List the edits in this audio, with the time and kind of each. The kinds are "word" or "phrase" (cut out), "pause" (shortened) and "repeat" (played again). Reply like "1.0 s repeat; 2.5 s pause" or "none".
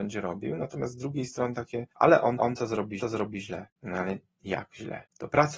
1.9 s pause; 2.4 s repeat; 3.0 s repeat